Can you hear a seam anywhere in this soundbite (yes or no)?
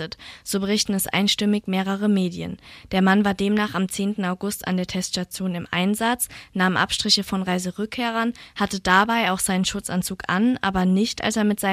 no